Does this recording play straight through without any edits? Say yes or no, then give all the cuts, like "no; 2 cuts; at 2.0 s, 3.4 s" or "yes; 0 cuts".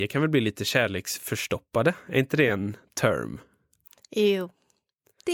yes; 0 cuts